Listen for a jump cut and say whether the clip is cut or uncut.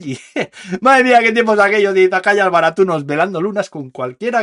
uncut